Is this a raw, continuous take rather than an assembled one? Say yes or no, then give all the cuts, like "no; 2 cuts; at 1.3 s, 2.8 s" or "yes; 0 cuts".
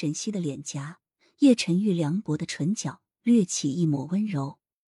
yes; 0 cuts